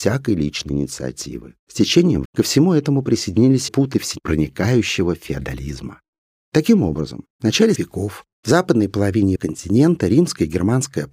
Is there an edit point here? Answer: yes; 8 cuts; at 1.6 s, 2.2 s, 3.7 s, 6.3 s, 7.3 s, 7.8 s, 8.3 s, 9.4 s

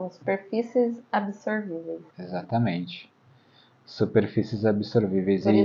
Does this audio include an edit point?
yes; 1 cut; at 2.1 s

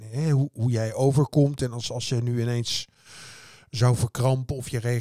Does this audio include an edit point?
no; 0 cuts

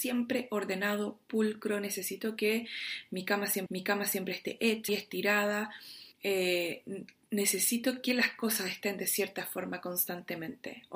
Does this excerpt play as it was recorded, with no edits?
no; 3 cuts; at 3.7 s, 4.9 s, 6.1 s

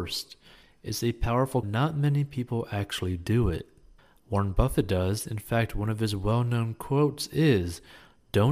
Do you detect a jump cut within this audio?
yes; 2 cuts; at 1.6 s, 4.0 s

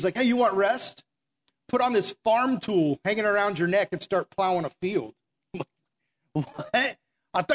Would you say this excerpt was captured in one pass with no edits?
yes; 0 cuts

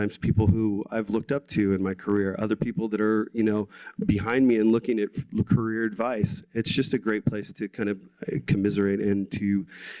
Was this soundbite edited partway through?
no; 0 cuts

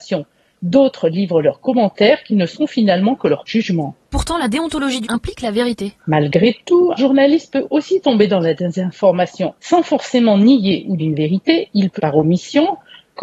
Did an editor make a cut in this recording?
yes; 7 cuts; at 3.5 s, 5.0 s, 6.0 s, 7.0 s, 9.6 s, 11.0 s, 12.0 s

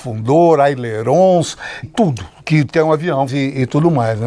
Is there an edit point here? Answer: yes; 2 cuts; at 1.8 s, 3.3 s

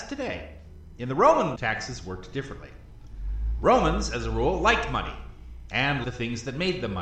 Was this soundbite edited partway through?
yes; 2 cuts; at 1.6 s, 6.0 s

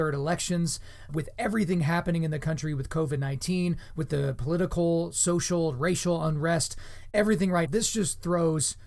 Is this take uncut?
no; 2 cuts; at 1.1 s, 7.7 s

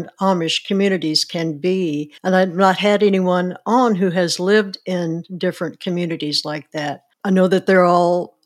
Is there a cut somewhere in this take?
yes; 2 cuts; at 2.2 s, 7.1 s

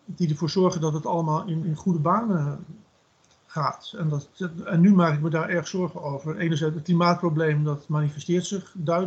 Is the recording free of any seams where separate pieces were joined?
no; 1 cut; at 1.6 s

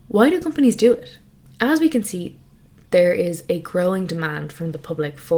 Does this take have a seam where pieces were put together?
no; 0 cuts

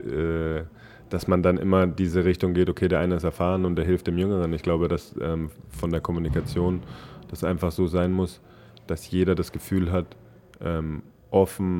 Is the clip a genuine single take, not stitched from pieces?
yes; 0 cuts

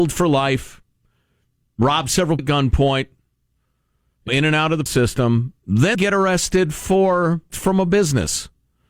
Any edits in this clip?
yes; 5 cuts; at 2.4 s, 4.3 s, 4.9 s, 5.9 s, 7.5 s

